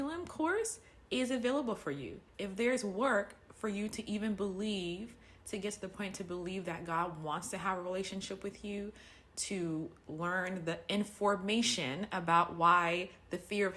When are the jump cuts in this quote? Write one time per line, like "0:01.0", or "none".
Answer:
0:02.3